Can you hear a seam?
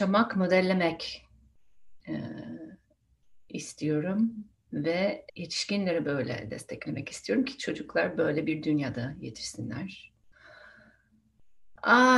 yes; 2 cuts; at 2.0 s, 5.3 s

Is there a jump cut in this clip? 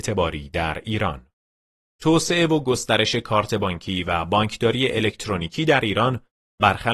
yes; 1 cut; at 1.8 s

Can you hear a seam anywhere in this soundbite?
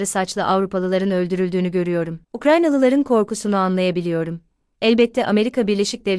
no; 0 cuts

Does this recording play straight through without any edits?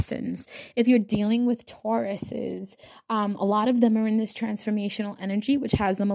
yes; 0 cuts

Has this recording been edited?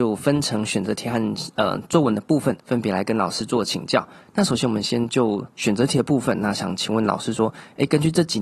yes; 2 cuts; at 2.6 s, 5.5 s

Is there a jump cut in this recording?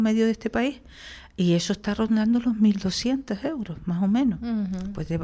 no; 0 cuts

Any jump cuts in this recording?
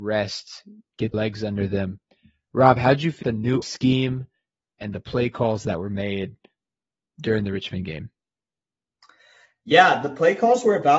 yes; 4 cuts; at 1.1 s, 3.2 s, 3.6 s, 4.8 s

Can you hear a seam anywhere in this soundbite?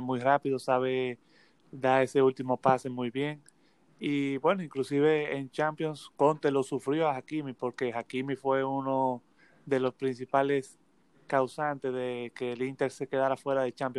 no; 0 cuts

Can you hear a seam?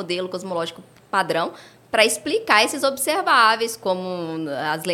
no; 0 cuts

